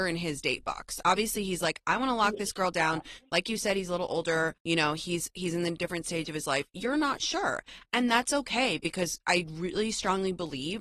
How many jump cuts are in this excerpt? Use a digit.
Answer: 1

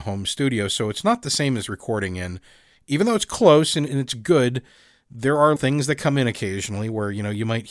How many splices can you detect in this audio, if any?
2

